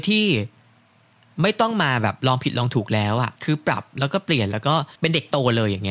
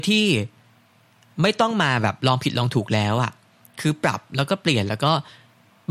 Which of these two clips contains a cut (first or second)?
first